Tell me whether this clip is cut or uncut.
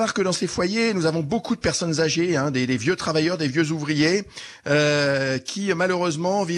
uncut